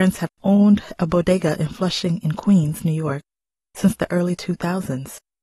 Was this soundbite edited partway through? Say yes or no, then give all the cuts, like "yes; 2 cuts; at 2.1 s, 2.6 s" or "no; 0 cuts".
no; 0 cuts